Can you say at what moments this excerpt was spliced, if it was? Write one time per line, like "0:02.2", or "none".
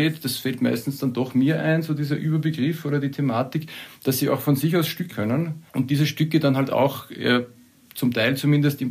0:05.1
0:05.7